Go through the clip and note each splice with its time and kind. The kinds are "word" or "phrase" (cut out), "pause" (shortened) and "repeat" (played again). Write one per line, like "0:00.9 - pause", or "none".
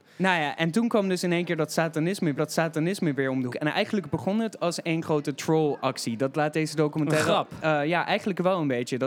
0:02.4 - repeat
0:03.5 - word